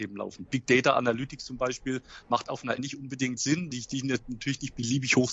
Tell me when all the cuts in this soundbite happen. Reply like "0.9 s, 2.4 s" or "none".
2.8 s, 3.4 s, 3.7 s